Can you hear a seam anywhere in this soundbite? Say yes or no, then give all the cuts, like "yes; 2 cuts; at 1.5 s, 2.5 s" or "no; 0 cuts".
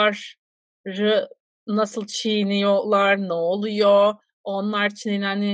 no; 0 cuts